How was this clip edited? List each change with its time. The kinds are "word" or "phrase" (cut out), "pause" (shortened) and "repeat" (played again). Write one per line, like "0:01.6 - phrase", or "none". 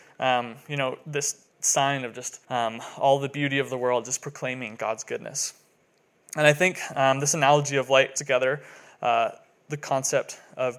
0:01.5 - pause
0:02.4 - pause
0:08.2 - phrase